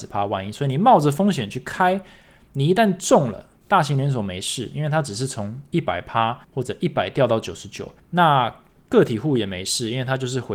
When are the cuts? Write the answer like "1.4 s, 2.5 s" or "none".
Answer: 3.6 s, 6.4 s, 8.0 s